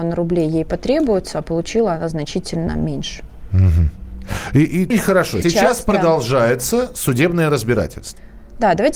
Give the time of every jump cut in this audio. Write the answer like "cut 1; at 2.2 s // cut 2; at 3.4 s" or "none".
cut 1; at 4.9 s // cut 2; at 5.4 s

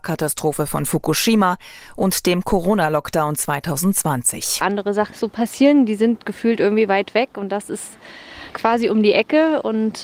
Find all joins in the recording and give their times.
cut 1; at 5.1 s

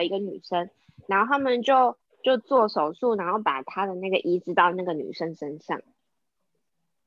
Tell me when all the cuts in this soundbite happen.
cut 1; at 2.0 s

